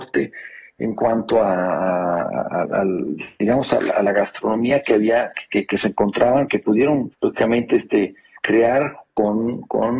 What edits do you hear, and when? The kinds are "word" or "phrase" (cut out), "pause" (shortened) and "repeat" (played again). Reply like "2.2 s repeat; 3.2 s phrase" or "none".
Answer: 7.1 s pause